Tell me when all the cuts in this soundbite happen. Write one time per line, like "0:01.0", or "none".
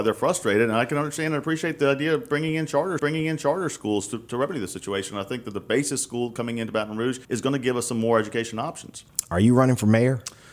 0:03.0
0:07.2